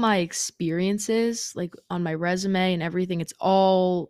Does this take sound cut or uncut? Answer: uncut